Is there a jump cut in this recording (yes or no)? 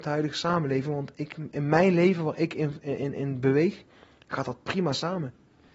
no